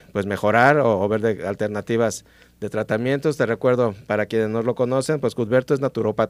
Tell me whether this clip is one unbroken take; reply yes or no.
yes